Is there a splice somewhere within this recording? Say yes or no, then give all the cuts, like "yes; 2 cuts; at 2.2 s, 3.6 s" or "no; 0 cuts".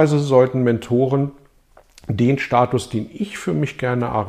no; 0 cuts